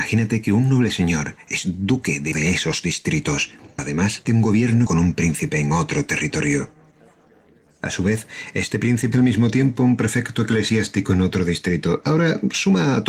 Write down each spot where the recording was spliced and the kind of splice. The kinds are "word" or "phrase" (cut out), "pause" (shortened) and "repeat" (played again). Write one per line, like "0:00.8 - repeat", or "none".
0:02.3 - word
0:03.8 - word
0:04.2 - word
0:04.9 - word
0:09.1 - word